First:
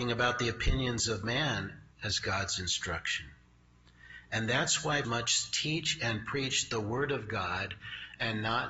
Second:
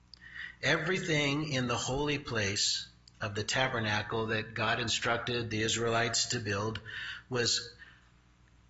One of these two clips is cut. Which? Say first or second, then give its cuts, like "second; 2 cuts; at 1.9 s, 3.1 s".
first; 2 cuts; at 1.9 s, 5.0 s